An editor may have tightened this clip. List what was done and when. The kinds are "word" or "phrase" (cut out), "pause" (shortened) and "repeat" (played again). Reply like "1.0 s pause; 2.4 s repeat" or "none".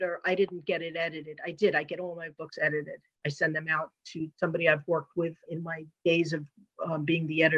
5.5 s word